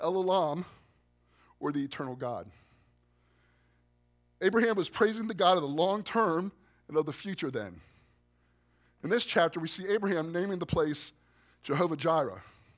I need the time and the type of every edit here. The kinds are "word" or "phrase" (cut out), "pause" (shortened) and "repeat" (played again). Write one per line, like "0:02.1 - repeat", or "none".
none